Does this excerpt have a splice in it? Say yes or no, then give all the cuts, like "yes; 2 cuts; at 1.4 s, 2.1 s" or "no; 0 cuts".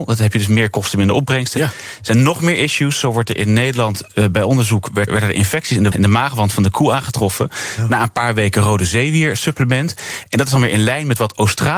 yes; 2 cuts; at 5.1 s, 5.9 s